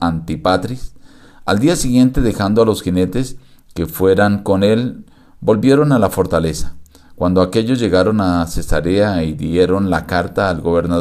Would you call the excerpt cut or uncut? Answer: uncut